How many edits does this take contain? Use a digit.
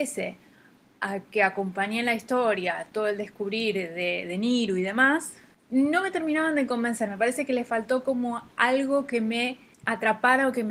0